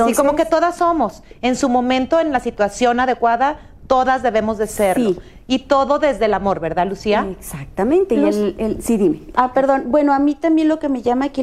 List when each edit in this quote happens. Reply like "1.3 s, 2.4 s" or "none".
none

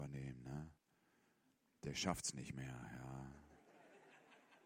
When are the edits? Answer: none

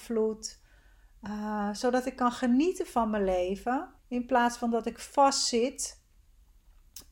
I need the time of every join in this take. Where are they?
4.0 s

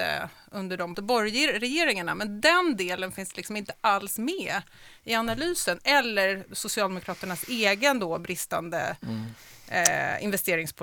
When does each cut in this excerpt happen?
0.9 s

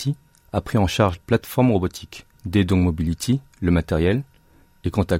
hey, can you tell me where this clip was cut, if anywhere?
1.2 s, 2.3 s

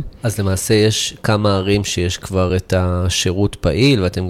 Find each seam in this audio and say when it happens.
none

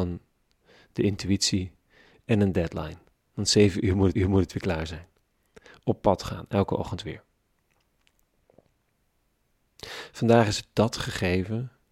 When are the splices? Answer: 4.1 s, 10.7 s

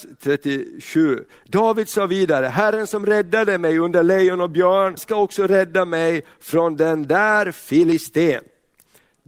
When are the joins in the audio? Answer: 5.0 s

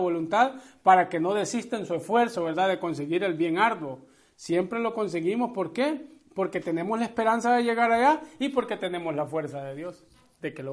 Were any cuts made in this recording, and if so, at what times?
none

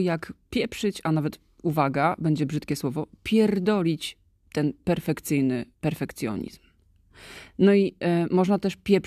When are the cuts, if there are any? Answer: 5.7 s

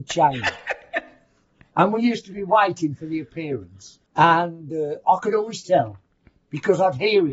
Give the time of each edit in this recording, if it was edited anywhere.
4.1 s

